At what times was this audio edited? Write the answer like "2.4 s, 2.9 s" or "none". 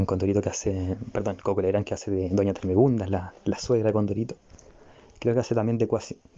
none